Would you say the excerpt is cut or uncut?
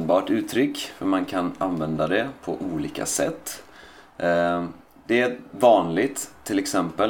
uncut